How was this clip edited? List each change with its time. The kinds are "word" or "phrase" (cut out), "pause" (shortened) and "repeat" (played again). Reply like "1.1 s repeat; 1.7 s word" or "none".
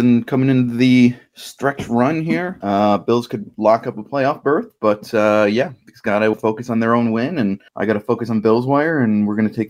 6.3 s word; 7.7 s pause